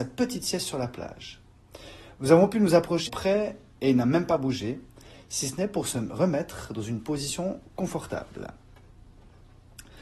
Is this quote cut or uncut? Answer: cut